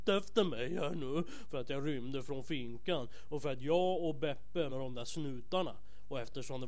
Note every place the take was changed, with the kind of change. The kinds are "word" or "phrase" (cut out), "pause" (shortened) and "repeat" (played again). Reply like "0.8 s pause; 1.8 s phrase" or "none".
4.7 s phrase